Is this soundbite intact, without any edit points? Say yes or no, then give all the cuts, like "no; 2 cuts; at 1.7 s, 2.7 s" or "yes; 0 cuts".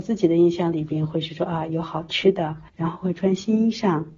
no; 1 cut; at 2.7 s